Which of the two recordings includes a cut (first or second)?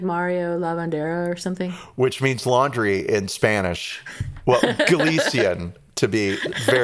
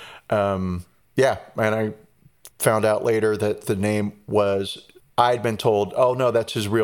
second